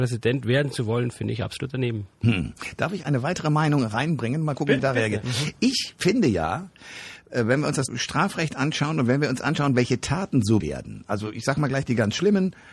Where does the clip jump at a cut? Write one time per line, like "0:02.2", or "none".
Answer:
0:03.0
0:04.8
0:07.9
0:10.6